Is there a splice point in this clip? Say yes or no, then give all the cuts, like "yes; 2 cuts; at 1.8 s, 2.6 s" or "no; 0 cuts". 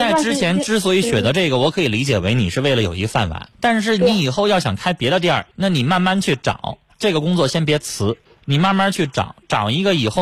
yes; 3 cuts; at 3.5 s, 5.5 s, 8.2 s